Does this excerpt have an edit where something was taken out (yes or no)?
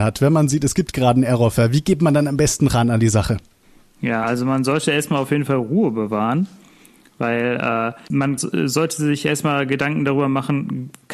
no